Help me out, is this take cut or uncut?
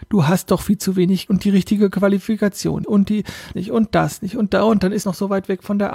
cut